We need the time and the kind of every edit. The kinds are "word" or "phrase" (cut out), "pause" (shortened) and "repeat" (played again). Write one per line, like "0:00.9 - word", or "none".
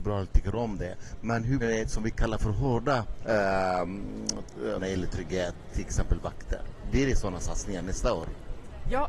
0:01.6 - phrase
0:04.8 - phrase